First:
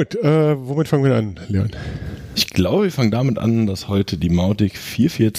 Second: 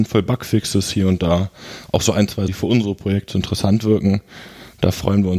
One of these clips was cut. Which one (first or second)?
second